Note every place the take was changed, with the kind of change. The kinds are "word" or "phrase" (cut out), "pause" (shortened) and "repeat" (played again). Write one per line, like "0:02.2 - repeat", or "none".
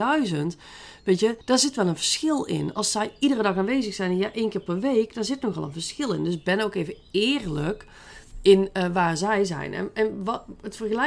0:01.4 - pause